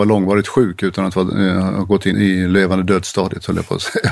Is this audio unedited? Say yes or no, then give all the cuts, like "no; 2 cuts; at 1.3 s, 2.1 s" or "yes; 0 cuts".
no; 1 cut; at 2.1 s